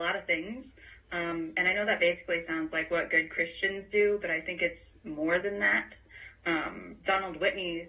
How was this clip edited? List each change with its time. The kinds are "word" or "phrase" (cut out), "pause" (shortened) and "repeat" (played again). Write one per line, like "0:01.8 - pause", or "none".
none